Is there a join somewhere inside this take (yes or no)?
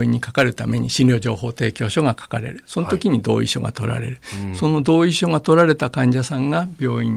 no